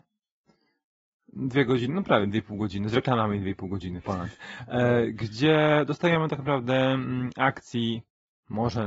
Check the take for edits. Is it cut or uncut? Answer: uncut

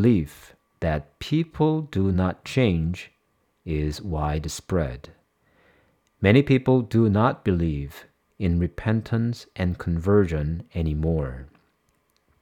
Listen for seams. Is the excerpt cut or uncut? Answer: uncut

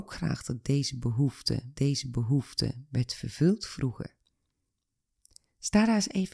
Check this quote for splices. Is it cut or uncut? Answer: cut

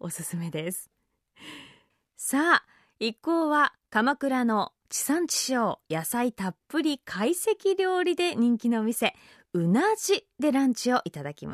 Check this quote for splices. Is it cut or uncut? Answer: uncut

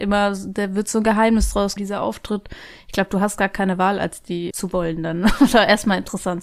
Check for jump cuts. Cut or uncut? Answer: cut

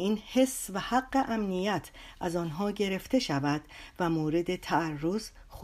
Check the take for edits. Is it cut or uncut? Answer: uncut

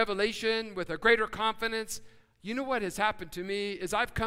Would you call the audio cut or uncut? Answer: uncut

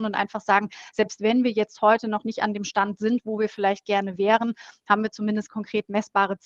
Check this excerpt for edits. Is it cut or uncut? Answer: cut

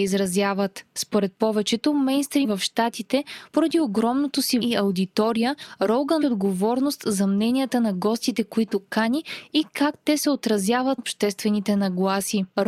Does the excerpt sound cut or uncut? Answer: cut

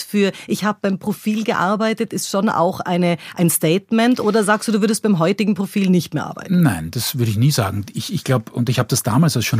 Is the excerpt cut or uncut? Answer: uncut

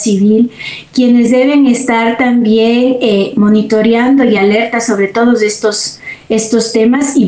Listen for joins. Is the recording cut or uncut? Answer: uncut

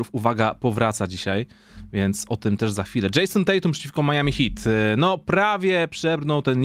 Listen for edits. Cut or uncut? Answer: uncut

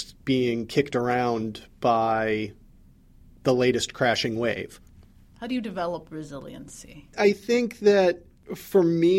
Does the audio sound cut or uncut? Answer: uncut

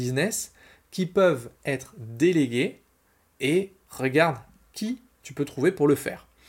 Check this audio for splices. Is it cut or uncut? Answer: uncut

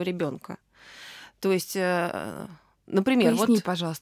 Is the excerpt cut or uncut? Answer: uncut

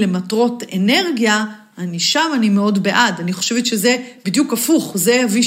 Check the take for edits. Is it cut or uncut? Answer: uncut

